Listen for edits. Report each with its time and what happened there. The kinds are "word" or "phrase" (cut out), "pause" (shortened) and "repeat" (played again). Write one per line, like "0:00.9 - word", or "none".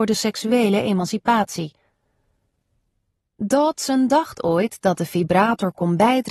none

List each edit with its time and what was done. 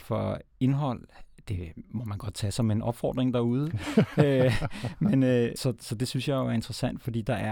0:05.6 - phrase

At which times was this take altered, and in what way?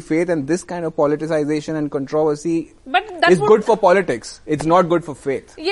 none

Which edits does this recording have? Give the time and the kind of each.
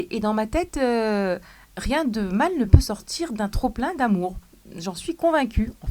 none

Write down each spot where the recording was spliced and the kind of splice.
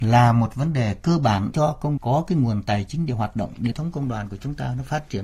0:01.5 - word
0:02.0 - word
0:03.7 - phrase

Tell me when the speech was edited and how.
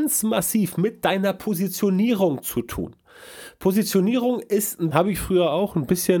0:04.9 - phrase

